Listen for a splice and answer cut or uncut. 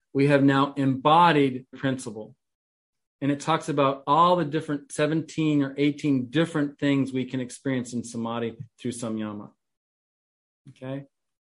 cut